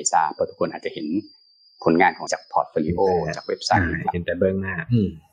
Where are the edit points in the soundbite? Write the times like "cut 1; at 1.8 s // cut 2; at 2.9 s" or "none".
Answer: cut 1; at 2.3 s